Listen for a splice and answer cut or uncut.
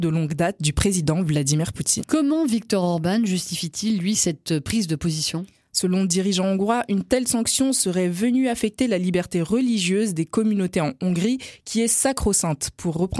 uncut